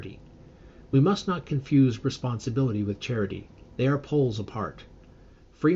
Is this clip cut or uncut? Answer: uncut